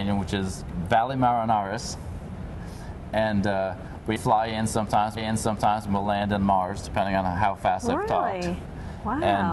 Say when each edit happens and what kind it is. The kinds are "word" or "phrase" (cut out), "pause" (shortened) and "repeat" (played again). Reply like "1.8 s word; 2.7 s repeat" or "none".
4.2 s word; 5.2 s repeat